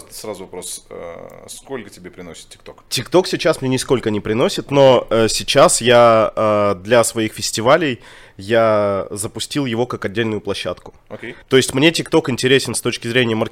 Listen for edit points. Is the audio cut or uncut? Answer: cut